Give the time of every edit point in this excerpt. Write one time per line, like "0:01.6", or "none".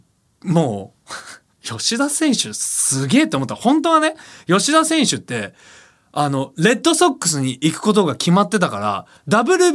none